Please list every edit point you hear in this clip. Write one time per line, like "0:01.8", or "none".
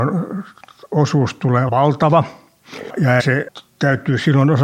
0:01.7
0:03.2

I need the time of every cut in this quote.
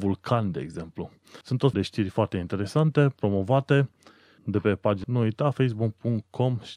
0:01.4
0:01.7
0:04.4
0:05.0

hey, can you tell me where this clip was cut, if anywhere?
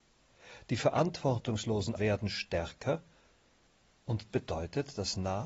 0:02.0
0:04.3

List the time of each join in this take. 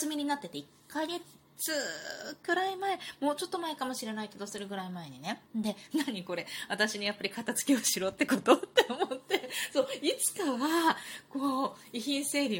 0:05.5

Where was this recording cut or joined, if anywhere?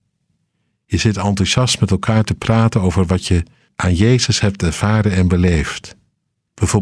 0:03.7

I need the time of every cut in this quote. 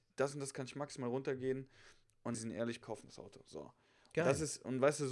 0:02.3
0:02.8

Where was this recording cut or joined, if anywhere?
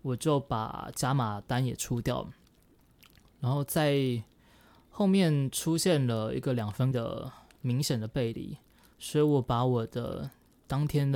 0:06.9

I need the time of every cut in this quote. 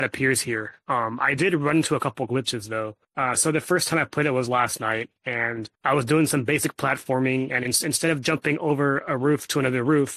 0:03.0
0:05.7

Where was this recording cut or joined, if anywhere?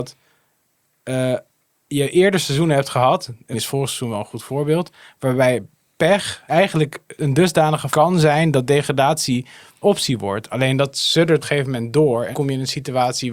0:03.5
0:06.5
0:07.2
0:07.9
0:09.8
0:11.4
0:12.3

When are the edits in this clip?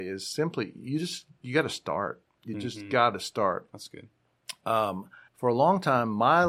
0:05.3

